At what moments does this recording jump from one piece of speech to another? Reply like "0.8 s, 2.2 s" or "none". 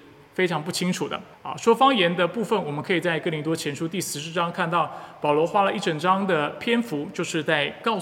1.3 s